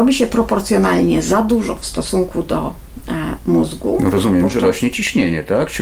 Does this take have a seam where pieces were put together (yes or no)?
yes